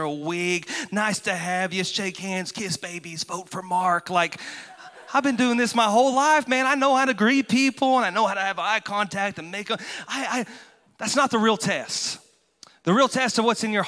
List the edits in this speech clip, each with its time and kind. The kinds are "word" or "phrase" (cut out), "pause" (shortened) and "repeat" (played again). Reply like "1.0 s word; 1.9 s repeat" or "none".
10.9 s pause